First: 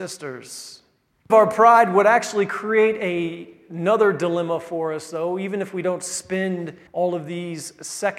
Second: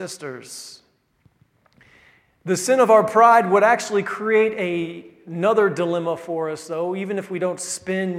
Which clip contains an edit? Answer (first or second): first